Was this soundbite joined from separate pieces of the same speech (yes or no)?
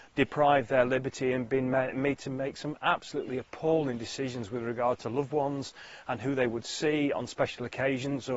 no